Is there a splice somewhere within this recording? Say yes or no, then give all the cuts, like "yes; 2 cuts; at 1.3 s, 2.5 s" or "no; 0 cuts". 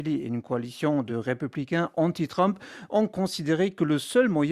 no; 0 cuts